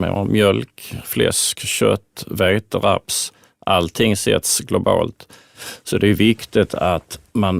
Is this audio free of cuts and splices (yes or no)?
yes